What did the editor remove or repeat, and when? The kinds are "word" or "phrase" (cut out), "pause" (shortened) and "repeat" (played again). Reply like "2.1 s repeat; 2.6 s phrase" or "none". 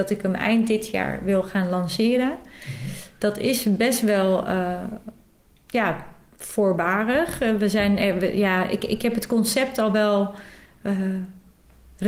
none

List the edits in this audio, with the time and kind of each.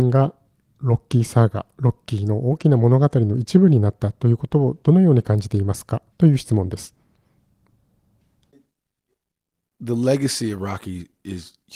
6.1 s pause

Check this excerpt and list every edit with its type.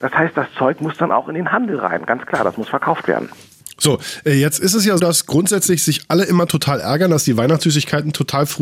5.0 s word

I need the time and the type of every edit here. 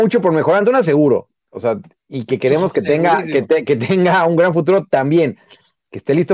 none

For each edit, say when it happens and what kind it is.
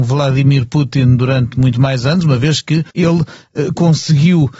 2.9 s pause

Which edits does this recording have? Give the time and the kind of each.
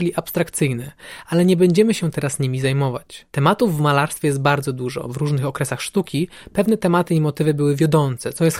3.3 s pause

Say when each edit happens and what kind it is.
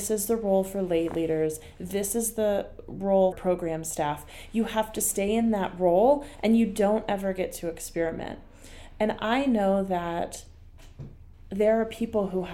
3.3 s word; 11.3 s pause

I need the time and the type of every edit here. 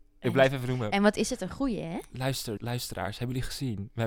2.6 s word

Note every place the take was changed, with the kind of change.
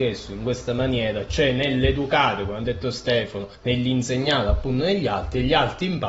3.5 s pause

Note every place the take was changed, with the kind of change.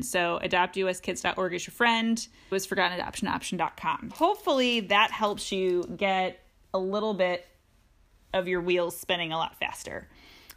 2.5 s word; 4.1 s word

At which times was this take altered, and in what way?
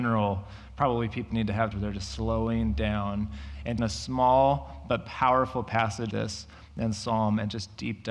1.3 s word; 1.7 s word; 3.8 s word; 6.1 s word

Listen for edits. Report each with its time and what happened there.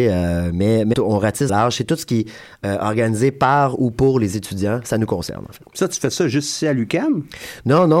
0.9 s word; 1.5 s word

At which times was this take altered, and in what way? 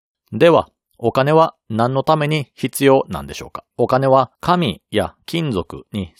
3.7 s pause; 4.3 s pause

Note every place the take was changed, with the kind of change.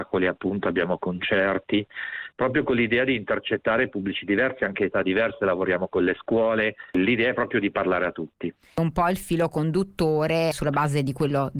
10.5 s word

